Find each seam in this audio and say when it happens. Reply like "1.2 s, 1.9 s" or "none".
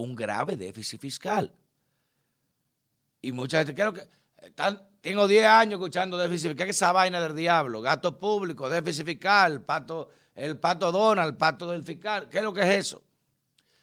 none